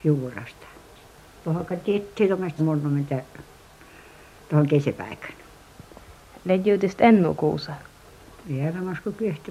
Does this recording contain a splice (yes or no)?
yes